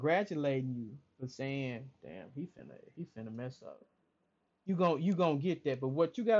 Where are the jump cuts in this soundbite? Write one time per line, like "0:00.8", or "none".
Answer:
none